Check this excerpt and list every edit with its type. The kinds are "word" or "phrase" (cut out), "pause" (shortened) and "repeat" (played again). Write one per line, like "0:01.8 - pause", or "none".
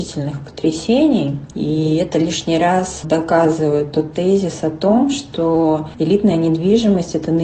none